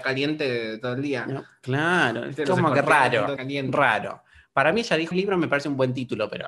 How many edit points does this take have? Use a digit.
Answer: 2